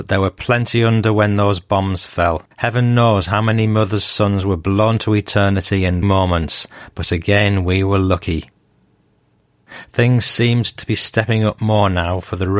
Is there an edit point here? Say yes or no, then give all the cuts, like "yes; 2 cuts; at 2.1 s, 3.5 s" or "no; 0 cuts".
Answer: yes; 2 cuts; at 2.5 s, 6.0 s